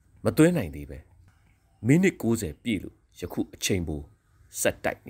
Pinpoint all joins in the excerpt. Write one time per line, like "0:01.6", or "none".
0:03.1